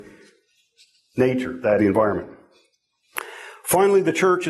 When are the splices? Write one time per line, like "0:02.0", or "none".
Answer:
0:01.8